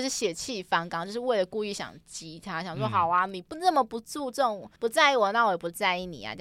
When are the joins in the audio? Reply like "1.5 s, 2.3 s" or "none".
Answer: 4.8 s